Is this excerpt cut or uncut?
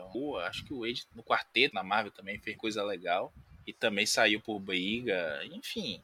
cut